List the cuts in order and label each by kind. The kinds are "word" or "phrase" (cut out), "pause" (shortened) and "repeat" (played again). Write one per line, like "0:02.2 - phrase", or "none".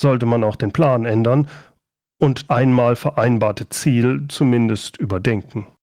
0:02.5 - word